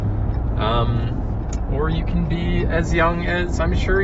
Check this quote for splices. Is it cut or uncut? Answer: uncut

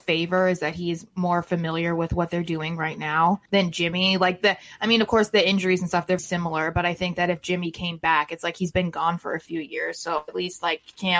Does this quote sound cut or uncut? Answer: cut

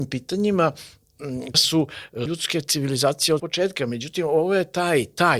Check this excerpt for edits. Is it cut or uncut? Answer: cut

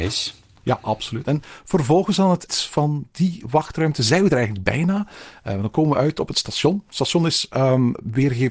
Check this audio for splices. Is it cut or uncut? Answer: cut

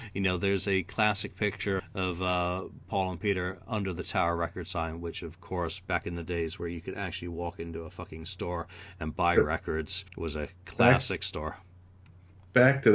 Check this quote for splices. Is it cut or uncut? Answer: cut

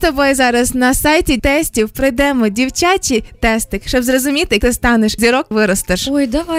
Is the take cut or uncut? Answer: cut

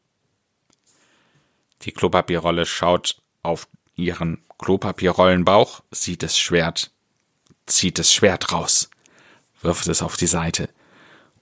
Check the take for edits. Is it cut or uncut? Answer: cut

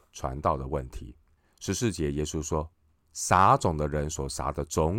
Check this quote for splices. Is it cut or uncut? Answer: cut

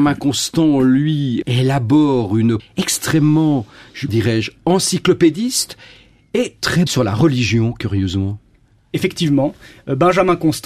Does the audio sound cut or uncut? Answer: cut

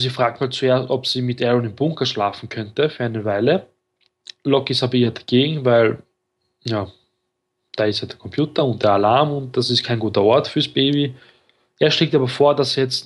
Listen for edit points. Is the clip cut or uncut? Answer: uncut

